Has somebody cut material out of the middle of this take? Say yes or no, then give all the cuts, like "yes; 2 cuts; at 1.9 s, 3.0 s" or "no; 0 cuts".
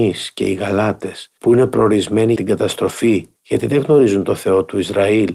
yes; 3 cuts; at 1.4 s, 2.4 s, 3.4 s